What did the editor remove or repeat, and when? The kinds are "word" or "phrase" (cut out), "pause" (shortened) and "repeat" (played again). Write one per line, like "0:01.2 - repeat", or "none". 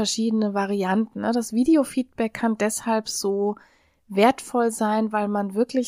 none